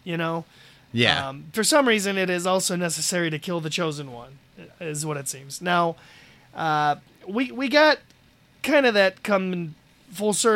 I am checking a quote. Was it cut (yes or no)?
no